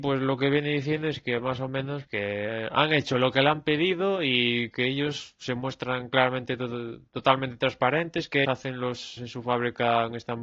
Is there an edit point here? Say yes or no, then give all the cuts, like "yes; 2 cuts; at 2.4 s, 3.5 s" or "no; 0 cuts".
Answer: yes; 3 cuts; at 2.1 s, 8.4 s, 9.2 s